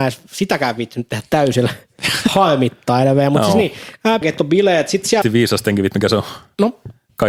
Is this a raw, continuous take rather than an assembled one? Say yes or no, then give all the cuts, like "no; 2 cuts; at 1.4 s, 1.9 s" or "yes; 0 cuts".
no; 3 cuts; at 4.2 s, 5.2 s, 5.9 s